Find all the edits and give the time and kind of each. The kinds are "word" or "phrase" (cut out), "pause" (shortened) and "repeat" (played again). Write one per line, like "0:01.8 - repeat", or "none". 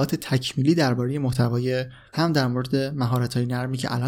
0:02.1 - word